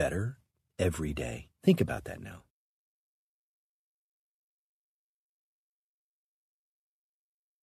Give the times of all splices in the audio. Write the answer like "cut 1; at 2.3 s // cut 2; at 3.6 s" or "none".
cut 1; at 1.5 s